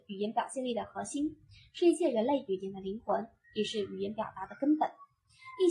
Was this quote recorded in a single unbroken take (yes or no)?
yes